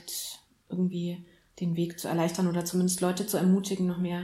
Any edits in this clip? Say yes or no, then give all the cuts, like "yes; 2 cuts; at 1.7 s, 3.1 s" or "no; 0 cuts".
no; 0 cuts